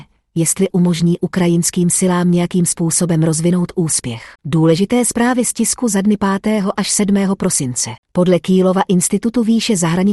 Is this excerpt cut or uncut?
cut